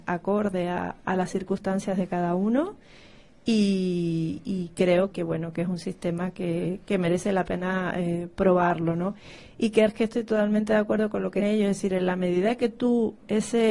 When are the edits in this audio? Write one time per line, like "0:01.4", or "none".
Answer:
0:05.1
0:09.9
0:11.4